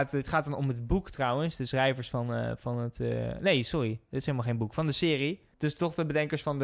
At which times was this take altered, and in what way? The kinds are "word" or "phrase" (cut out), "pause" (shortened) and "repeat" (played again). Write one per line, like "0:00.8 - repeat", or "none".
0:05.5 - pause

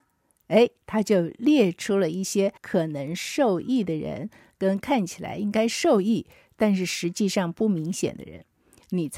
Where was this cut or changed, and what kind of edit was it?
0:02.6 - pause

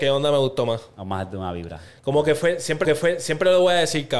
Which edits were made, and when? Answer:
0:02.8 - repeat

